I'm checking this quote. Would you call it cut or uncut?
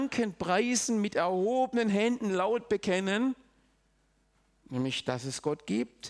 uncut